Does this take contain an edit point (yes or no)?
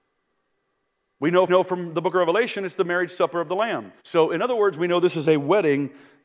yes